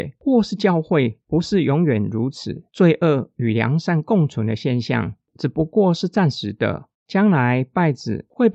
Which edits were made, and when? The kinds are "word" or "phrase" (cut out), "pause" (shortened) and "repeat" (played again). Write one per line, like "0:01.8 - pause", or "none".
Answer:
0:02.7 - pause
0:06.9 - pause